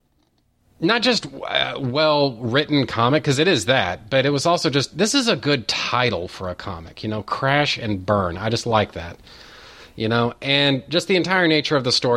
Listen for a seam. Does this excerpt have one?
no; 0 cuts

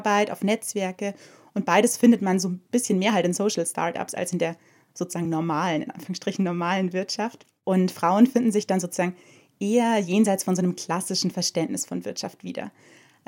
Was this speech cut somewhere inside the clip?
no; 0 cuts

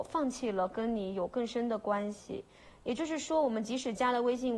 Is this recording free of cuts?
yes; 0 cuts

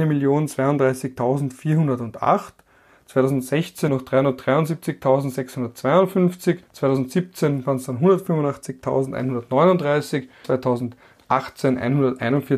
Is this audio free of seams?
no; 3 cuts; at 3.9 s, 6.7 s, 10.4 s

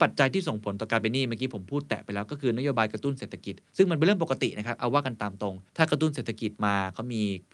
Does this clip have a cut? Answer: yes; 1 cut; at 5.7 s

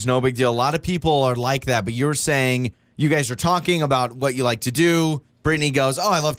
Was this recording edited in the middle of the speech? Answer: no; 0 cuts

